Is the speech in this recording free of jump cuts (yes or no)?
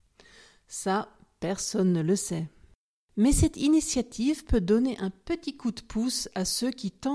yes